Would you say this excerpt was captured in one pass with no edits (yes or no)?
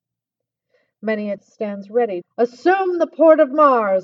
no